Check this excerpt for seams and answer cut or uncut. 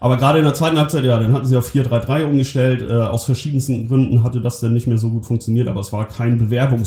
uncut